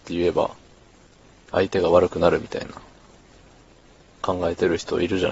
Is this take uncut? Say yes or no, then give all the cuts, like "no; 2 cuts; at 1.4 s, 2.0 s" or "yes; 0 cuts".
yes; 0 cuts